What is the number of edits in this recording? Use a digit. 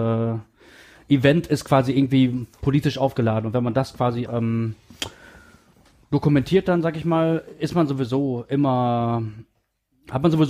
1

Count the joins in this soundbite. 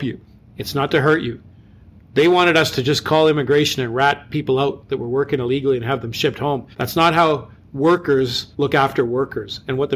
2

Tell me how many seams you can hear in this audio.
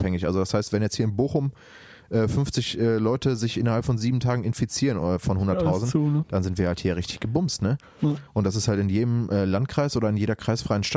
0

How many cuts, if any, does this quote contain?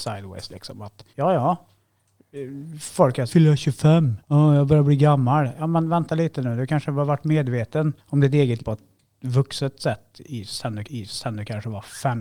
6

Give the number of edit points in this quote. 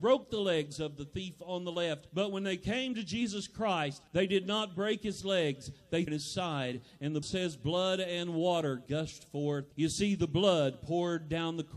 5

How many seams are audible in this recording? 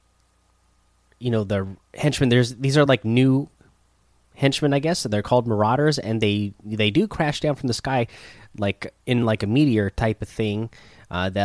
0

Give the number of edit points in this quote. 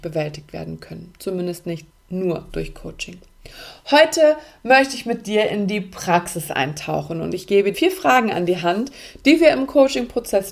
2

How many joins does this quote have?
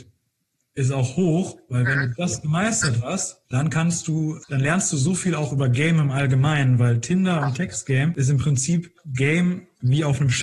1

